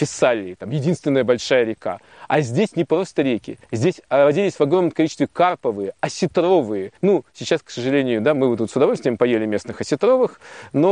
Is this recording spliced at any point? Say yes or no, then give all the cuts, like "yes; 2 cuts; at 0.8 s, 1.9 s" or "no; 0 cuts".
yes; 2 cuts; at 3.6 s, 7.0 s